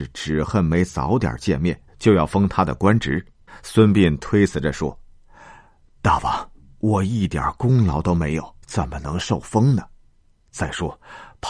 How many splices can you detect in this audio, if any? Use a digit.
3